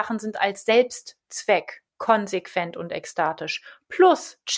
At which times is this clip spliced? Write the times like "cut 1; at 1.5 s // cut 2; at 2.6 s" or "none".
cut 1; at 1.9 s